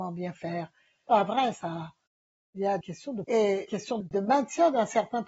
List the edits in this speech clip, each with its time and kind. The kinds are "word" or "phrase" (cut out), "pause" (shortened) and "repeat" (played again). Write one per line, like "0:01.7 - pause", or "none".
0:01.1 - word
0:02.8 - word
0:03.2 - word
0:03.7 - word
0:04.0 - word